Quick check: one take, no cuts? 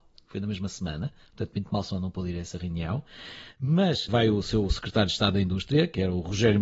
no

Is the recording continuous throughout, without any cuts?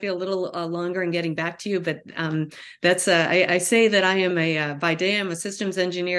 yes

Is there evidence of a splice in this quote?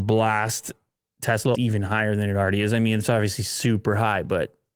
yes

